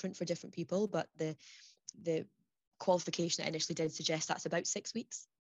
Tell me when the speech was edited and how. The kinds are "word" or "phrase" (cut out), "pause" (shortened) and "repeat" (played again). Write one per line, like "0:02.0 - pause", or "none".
0:01.9 - word